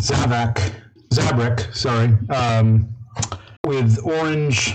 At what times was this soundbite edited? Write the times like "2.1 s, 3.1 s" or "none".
3.6 s